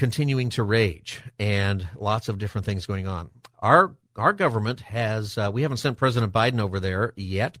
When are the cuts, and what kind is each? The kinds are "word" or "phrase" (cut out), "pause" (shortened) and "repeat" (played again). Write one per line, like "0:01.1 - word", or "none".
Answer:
none